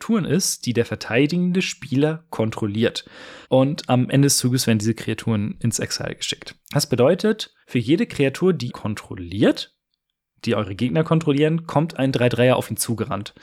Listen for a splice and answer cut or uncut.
cut